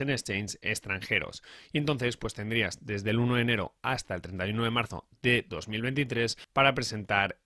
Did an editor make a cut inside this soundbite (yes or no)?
no